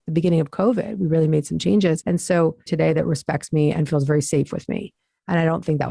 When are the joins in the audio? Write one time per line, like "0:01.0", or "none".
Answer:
0:02.7